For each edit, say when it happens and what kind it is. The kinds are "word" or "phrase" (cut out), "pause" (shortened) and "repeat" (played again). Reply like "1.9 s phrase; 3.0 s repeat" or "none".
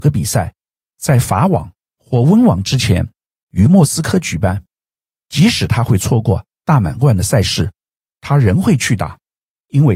none